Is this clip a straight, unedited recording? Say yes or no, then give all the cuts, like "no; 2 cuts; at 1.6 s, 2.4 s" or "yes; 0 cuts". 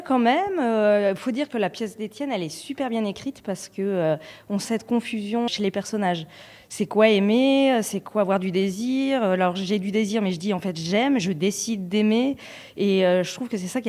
no; 2 cuts; at 4.6 s, 5.5 s